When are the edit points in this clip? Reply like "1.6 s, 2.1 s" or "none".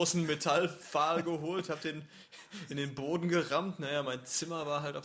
none